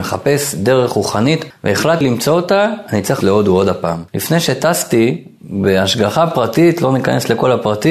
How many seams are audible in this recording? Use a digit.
4